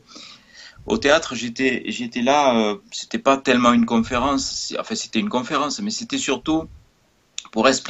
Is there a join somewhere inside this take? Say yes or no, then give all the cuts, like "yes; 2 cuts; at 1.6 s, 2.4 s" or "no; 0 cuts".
yes; 1 cut; at 2.8 s